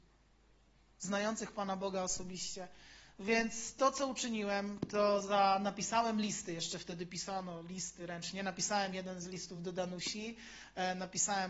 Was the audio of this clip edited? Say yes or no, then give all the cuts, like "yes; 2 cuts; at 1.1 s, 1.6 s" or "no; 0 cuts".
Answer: no; 0 cuts